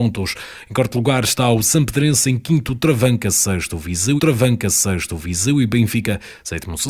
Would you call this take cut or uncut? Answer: cut